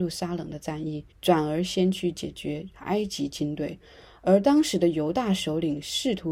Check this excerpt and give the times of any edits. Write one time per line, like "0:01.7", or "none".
0:01.1